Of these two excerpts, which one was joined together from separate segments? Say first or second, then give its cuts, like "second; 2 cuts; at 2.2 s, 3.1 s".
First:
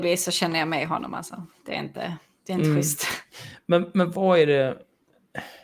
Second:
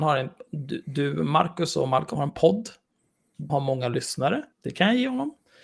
second; 3 cuts; at 2.2 s, 3.5 s, 4.5 s